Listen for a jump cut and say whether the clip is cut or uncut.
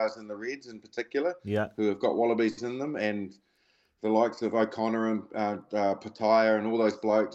uncut